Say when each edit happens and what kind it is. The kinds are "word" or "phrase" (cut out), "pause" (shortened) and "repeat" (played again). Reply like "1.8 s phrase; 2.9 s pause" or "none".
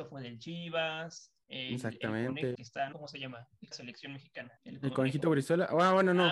2.5 s phrase; 2.9 s word; 3.7 s phrase; 4.6 s pause